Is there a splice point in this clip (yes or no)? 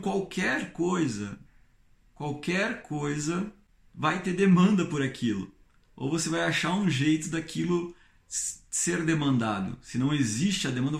no